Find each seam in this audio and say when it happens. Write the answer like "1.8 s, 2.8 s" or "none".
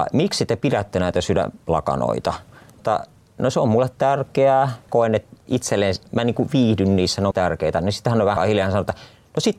2.8 s, 4.9 s, 7.3 s, 8.4 s